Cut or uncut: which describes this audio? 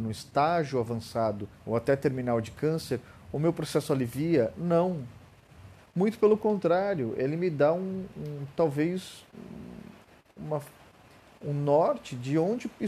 cut